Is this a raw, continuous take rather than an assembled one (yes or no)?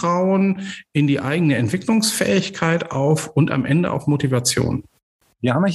yes